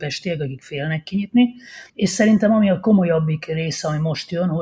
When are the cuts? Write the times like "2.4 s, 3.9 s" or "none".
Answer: 1.9 s